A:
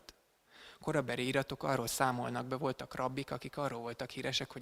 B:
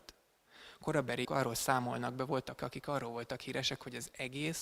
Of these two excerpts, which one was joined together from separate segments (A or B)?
B